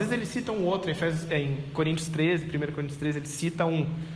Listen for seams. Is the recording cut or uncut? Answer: uncut